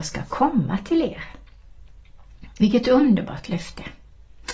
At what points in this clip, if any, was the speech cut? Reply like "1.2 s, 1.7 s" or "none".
none